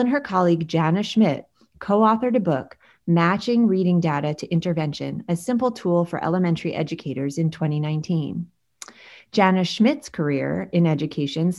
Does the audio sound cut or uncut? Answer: uncut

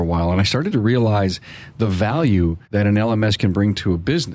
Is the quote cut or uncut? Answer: cut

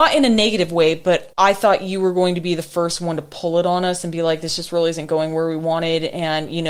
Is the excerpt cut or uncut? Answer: cut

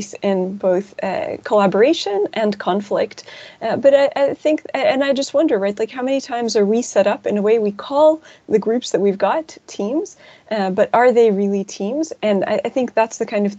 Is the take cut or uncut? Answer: uncut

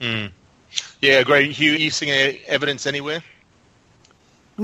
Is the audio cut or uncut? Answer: cut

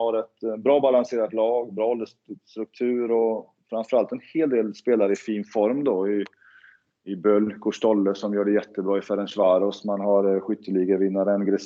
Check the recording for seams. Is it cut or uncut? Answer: uncut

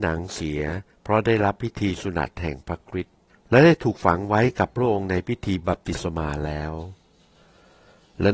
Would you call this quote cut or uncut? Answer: cut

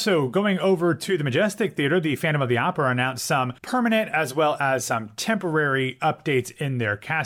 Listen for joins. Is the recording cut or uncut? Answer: cut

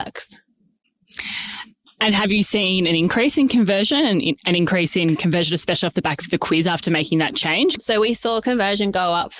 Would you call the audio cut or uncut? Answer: uncut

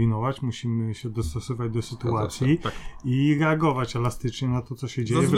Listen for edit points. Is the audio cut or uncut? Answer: uncut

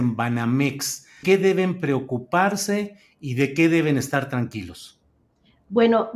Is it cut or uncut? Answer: cut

